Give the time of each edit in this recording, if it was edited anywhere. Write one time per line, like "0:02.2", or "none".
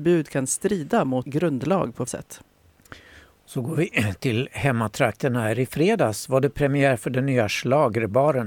0:01.2
0:02.1